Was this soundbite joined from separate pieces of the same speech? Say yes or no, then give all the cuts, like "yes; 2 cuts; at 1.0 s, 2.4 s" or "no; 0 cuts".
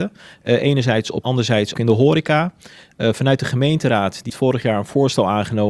yes; 3 cuts; at 1.2 s, 1.7 s, 4.3 s